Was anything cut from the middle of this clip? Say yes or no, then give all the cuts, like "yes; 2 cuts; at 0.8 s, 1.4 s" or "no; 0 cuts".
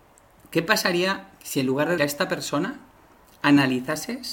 yes; 1 cut; at 2.0 s